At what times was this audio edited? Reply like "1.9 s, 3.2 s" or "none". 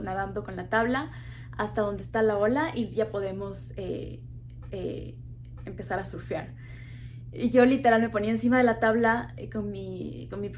4.7 s